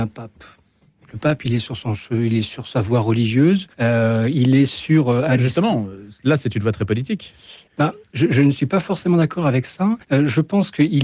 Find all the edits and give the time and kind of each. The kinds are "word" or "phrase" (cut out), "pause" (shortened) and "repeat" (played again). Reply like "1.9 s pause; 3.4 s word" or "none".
3.7 s pause; 6.2 s pause; 10.0 s pause